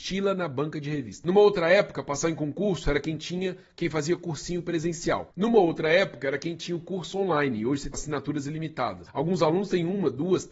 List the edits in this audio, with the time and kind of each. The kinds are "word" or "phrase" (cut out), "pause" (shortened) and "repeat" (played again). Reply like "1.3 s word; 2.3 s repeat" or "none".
7.9 s word